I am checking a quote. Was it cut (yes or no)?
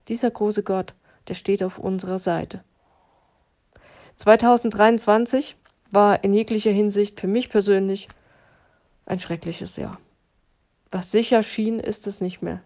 no